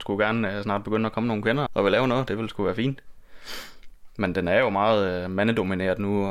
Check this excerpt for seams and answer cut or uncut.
cut